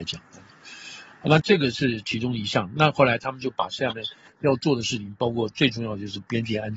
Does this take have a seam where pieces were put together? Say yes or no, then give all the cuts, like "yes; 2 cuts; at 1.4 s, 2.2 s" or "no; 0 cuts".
no; 0 cuts